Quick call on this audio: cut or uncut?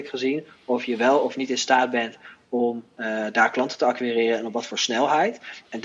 uncut